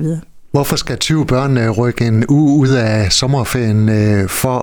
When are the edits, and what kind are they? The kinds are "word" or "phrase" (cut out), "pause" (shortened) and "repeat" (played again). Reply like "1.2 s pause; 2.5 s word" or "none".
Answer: none